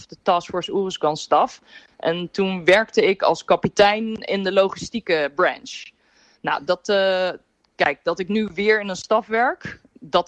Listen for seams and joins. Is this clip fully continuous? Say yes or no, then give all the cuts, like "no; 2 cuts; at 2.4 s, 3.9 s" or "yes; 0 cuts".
yes; 0 cuts